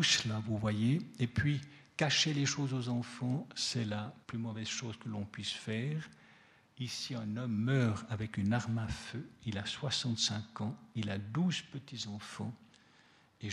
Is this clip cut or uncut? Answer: cut